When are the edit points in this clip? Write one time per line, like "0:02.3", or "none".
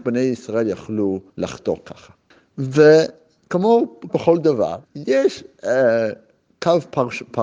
0:01.3
0:04.1
0:04.8